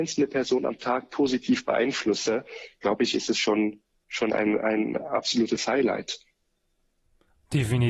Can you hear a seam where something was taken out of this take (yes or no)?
no